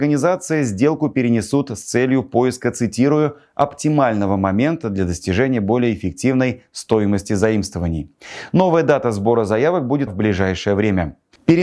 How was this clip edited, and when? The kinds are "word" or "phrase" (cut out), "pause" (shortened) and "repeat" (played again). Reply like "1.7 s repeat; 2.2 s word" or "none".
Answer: 10.1 s word